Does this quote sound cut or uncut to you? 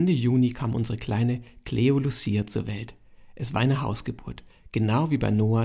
uncut